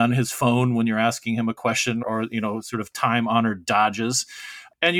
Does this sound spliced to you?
yes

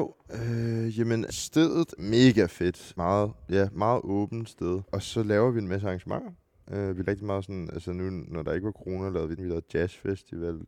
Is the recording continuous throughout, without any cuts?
no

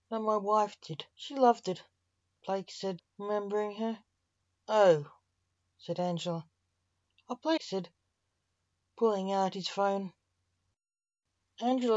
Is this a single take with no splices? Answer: no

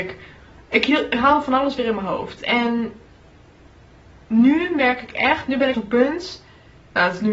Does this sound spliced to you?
yes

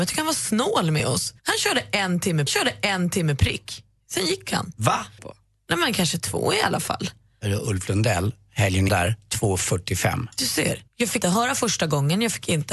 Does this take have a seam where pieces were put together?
yes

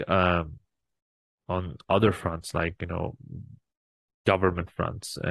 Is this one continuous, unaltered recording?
yes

